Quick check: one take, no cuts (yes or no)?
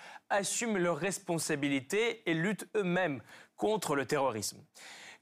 yes